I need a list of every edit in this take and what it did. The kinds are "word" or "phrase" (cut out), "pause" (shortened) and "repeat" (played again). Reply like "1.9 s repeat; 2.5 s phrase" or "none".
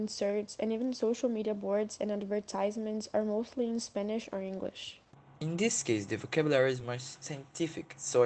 none